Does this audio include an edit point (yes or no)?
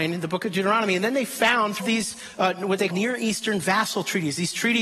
yes